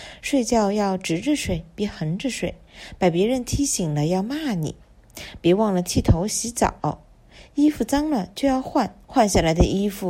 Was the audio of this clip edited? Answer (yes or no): yes